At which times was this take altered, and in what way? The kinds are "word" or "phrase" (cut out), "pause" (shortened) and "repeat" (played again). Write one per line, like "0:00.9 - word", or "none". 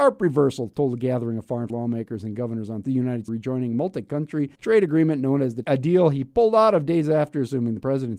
0:01.7 - word
0:02.8 - phrase
0:03.3 - phrase
0:04.5 - pause
0:05.6 - word